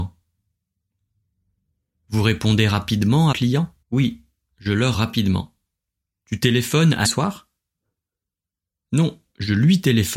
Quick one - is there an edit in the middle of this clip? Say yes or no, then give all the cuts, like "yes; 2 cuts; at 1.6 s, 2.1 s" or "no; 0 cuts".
yes; 5 cuts; at 3.3 s, 3.8 s, 4.9 s, 6.0 s, 7.0 s